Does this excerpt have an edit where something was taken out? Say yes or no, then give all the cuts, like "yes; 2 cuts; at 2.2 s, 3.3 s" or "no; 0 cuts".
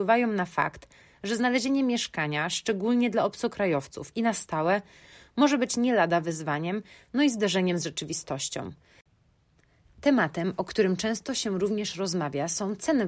no; 0 cuts